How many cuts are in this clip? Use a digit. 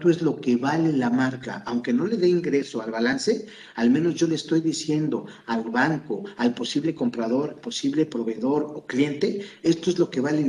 1